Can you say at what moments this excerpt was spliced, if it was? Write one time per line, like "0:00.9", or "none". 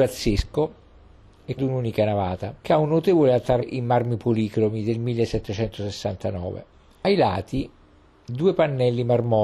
0:01.6
0:02.6
0:03.6
0:06.7